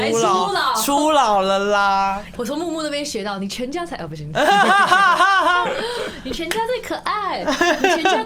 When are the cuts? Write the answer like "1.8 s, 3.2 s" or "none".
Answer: 2.4 s